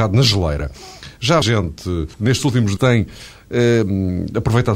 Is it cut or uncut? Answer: cut